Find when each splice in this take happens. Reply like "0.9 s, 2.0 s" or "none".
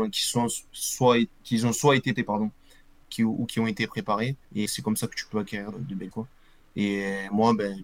2.2 s, 4.7 s, 5.7 s, 6.1 s